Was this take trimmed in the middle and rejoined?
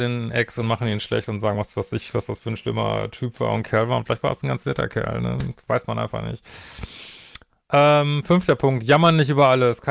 no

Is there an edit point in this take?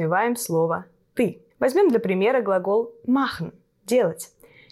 yes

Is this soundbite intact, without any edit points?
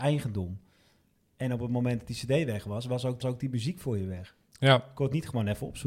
no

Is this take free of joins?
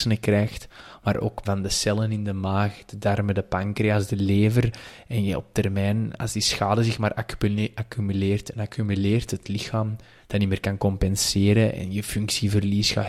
no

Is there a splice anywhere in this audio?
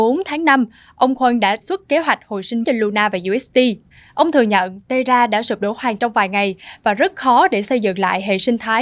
yes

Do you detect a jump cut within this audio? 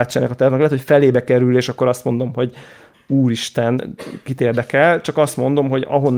no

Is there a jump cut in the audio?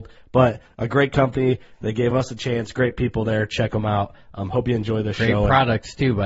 no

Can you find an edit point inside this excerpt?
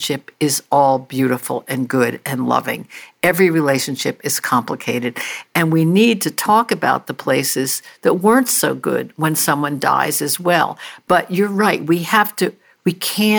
no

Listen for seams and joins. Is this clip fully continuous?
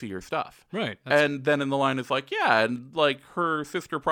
yes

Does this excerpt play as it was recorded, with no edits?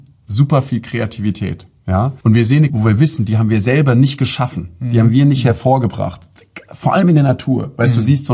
no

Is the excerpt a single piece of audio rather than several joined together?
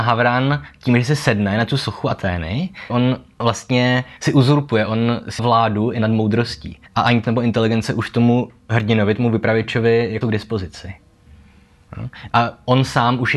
no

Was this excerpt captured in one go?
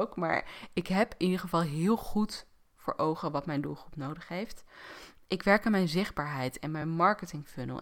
yes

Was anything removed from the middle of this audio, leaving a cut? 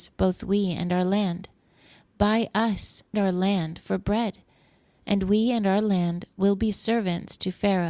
yes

